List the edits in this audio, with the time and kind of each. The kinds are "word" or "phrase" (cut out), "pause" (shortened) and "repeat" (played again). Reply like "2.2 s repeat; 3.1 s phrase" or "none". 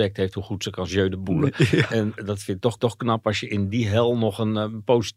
2.8 s repeat